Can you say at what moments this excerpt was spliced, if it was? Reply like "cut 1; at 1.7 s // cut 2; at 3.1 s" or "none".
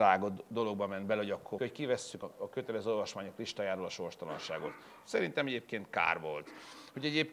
cut 1; at 1.6 s // cut 2; at 2.2 s